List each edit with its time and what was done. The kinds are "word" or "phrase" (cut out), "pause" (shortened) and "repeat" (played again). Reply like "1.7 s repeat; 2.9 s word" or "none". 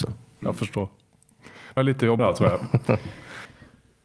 1.8 s word; 2.2 s word